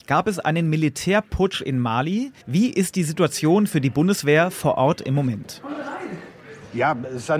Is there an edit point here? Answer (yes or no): yes